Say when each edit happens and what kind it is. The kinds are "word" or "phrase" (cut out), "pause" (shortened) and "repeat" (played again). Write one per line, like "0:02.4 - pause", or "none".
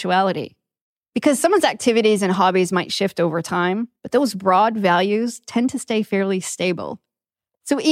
0:04.0 - pause